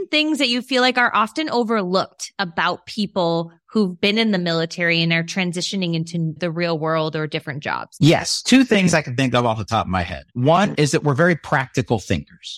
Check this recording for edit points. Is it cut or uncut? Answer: cut